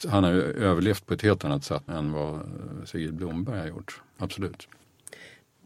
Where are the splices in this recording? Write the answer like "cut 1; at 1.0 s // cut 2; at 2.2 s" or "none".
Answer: cut 1; at 1.9 s